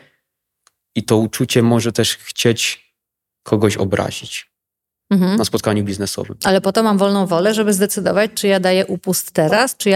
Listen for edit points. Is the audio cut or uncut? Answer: uncut